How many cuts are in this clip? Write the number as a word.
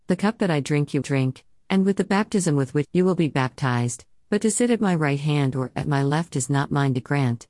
two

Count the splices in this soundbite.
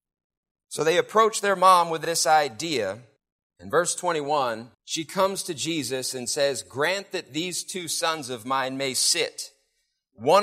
two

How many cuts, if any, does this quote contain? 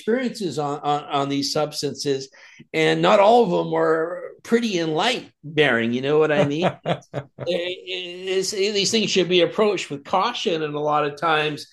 one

